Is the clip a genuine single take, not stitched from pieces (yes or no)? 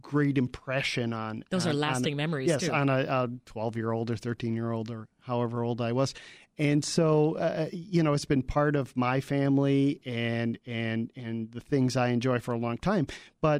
yes